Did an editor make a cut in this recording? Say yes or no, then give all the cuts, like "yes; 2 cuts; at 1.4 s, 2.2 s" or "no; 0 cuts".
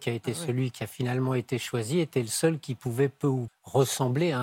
yes; 1 cut; at 3.5 s